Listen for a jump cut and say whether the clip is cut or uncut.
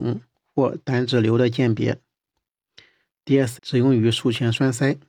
cut